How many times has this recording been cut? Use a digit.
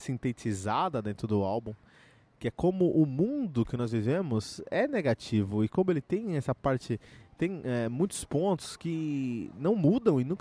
0